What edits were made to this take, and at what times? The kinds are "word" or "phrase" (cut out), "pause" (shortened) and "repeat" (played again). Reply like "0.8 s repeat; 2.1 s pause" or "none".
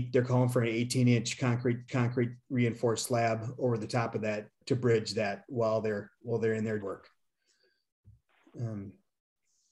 1.9 s repeat; 4.6 s word; 6.8 s phrase